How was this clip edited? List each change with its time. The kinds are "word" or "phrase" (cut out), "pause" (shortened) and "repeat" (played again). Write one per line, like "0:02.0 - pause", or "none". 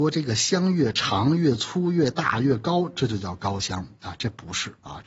none

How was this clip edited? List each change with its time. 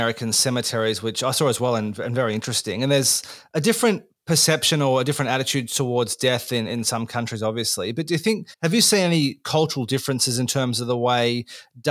0:08.5 - pause

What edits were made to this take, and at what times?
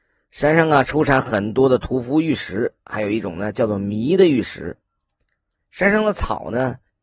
none

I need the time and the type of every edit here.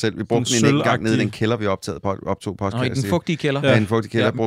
none

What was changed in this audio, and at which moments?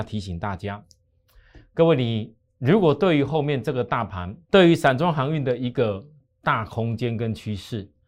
0:04.4 - pause

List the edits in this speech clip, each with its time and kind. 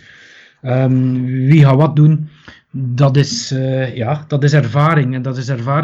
none

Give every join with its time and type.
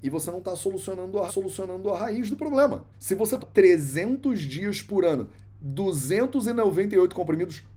0:01.3 - repeat
0:02.9 - pause
0:03.4 - word

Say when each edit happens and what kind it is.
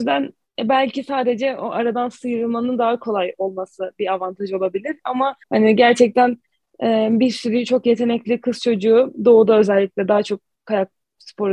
0:05.4 - pause

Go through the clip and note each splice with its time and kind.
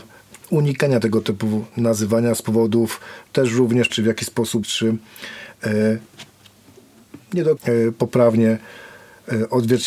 0:03.9 - word
0:04.6 - word
0:07.6 - word

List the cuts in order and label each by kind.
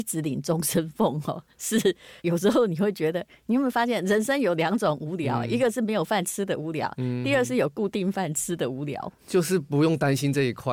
0:02.2 - pause
0:09.2 - pause

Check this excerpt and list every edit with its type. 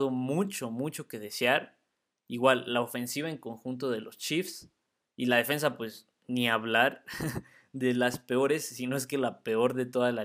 none

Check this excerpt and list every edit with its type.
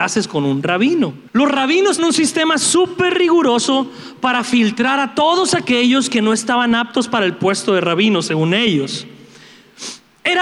0:01.3 - pause
0:02.0 - word

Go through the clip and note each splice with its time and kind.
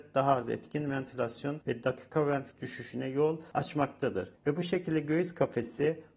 0:02.5 - word
0:04.4 - pause

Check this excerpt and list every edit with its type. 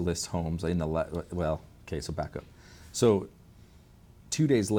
none

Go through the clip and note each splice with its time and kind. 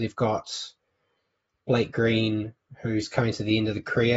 none

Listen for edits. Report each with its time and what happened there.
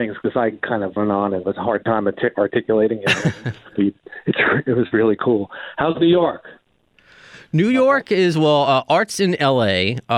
0:01.0 - phrase
0:01.4 - word

